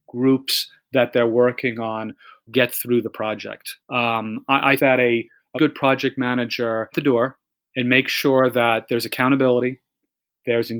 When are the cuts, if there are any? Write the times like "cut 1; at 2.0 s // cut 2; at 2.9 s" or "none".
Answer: cut 1; at 2.5 s // cut 2; at 3.8 s // cut 3; at 4.8 s // cut 4; at 5.6 s // cut 5; at 6.9 s // cut 6; at 7.6 s

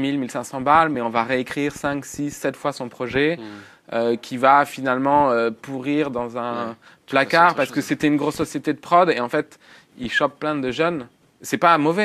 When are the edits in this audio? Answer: none

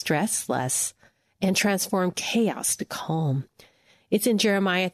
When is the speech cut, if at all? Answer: none

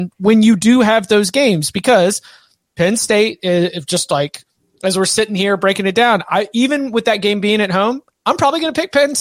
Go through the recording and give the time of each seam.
none

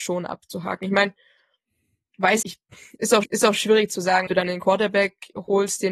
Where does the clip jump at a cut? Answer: cut 1; at 2.4 s // cut 2; at 3.2 s // cut 3; at 4.3 s

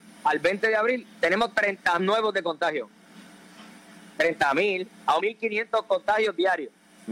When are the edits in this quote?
cut 1; at 2.0 s // cut 2; at 5.2 s

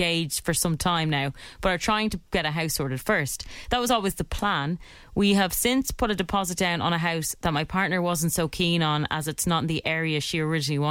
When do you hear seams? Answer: none

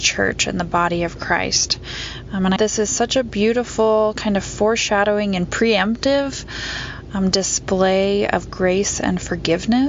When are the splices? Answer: cut 1; at 2.6 s

